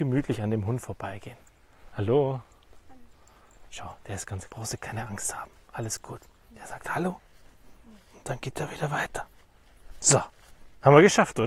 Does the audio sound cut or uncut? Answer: cut